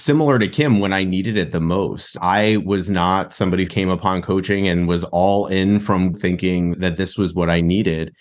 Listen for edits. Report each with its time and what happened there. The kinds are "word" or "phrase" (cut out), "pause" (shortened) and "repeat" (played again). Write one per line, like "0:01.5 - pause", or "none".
0:03.7 - word
0:06.1 - word
0:06.7 - word